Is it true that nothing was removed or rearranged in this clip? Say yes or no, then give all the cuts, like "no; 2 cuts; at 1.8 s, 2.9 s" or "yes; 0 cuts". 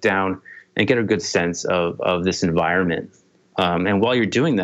yes; 0 cuts